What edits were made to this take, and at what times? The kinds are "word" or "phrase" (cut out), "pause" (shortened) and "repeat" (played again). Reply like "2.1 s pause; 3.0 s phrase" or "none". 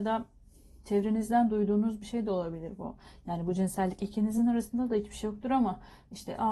none